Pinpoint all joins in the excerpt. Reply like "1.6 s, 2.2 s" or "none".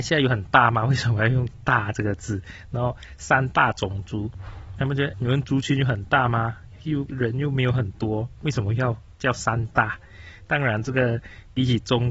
5.1 s